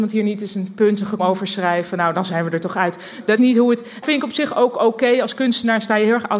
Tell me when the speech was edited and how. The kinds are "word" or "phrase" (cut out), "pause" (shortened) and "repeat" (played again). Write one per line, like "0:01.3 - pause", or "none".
0:01.2 - word
0:03.4 - word
0:04.0 - word

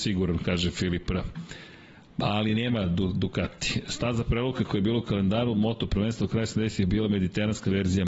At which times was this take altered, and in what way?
none

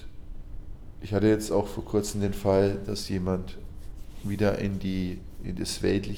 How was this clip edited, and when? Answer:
none

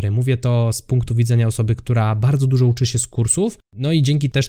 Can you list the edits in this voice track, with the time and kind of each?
none

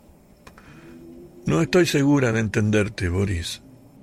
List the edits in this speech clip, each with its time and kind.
none

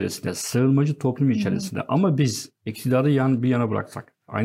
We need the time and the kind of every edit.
0:02.6 - pause

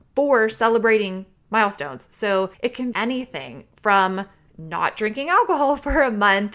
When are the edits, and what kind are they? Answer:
0:02.5 - pause
0:02.9 - word

